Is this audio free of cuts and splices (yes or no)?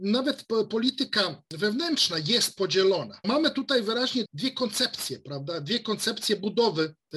no